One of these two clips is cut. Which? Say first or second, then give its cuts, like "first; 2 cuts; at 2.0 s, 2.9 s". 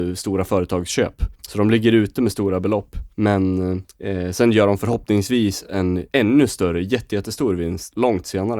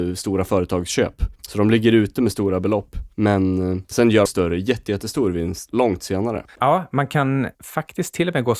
second; 2 cuts; at 3.9 s, 4.3 s